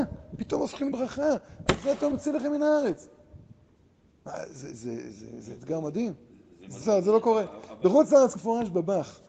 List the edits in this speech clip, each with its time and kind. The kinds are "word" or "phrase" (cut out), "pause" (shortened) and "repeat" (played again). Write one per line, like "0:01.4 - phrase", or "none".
0:00.9 - word
0:02.1 - word
0:06.8 - word
0:08.4 - word